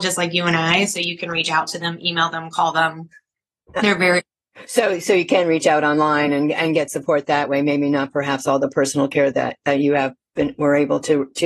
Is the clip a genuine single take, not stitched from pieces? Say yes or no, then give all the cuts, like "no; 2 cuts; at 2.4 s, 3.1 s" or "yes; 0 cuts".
yes; 0 cuts